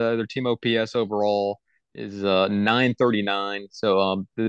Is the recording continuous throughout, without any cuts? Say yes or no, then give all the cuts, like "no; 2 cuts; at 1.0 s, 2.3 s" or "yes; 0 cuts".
yes; 0 cuts